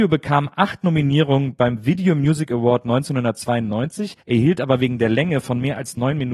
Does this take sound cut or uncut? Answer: cut